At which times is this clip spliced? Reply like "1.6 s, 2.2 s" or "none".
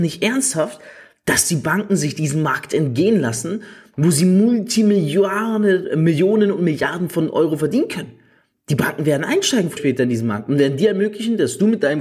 9.8 s